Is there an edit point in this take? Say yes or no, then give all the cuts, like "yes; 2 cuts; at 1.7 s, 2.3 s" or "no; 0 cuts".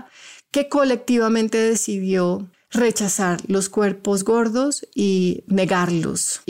yes; 1 cut; at 2.5 s